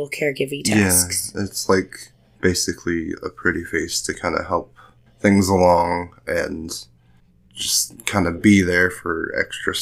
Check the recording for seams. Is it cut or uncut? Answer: uncut